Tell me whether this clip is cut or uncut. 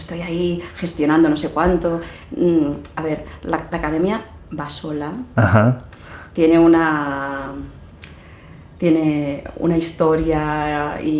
uncut